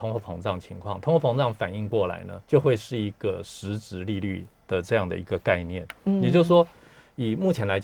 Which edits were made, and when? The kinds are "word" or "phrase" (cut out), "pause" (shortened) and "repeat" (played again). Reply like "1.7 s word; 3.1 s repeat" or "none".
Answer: 2.4 s pause